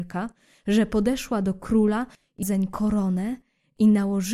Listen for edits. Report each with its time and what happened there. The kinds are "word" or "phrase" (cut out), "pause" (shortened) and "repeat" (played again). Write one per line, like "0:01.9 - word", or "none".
0:02.4 - word

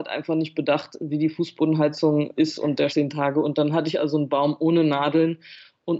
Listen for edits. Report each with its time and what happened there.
0:02.4 - word
0:02.9 - phrase

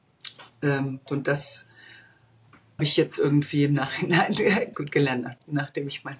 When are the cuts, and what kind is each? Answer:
0:01.1 - word
0:02.8 - word
0:04.7 - word

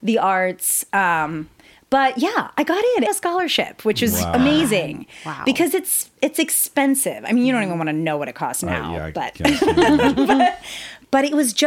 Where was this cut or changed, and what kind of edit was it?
0:03.1 - phrase

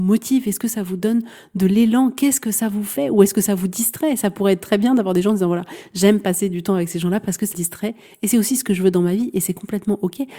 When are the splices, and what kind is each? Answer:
0:07.5 - word

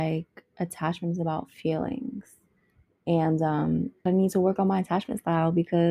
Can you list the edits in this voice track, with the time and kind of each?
0:04.1 - word

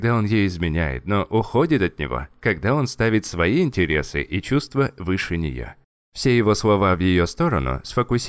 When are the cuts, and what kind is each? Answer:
none

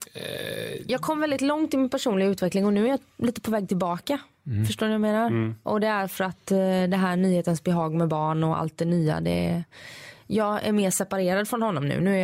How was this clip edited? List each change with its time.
none

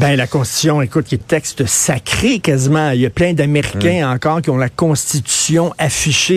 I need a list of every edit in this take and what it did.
0:01.2 - word

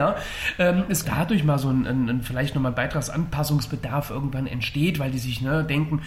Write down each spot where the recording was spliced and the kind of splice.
0:01.0 - phrase

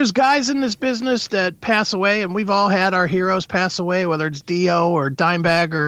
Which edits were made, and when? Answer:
0:01.3 - word

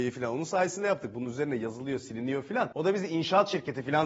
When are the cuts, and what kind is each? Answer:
none

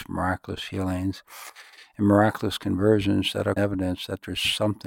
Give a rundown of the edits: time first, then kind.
0:03.6 - word

